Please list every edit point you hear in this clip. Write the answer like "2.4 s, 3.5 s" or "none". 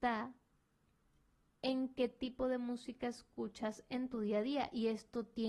none